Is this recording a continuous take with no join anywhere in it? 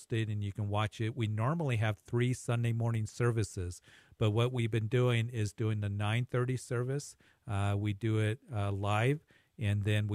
yes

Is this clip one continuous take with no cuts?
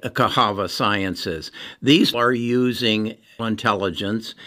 no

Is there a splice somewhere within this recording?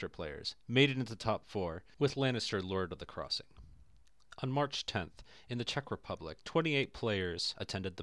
no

